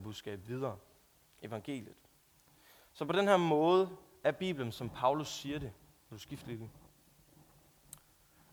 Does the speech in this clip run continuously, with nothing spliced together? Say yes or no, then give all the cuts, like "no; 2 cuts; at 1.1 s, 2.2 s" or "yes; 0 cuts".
yes; 0 cuts